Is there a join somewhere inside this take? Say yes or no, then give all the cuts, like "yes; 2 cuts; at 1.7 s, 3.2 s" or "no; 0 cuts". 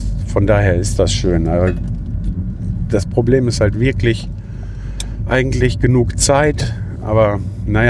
no; 0 cuts